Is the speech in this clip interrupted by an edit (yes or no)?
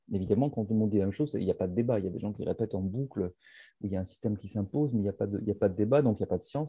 no